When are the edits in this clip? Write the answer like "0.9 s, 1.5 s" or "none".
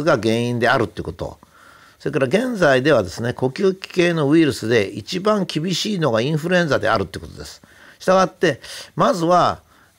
none